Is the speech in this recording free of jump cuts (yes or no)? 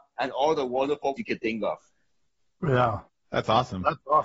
no